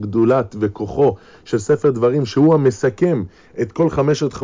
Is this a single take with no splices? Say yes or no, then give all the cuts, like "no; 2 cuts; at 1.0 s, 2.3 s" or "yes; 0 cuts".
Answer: yes; 0 cuts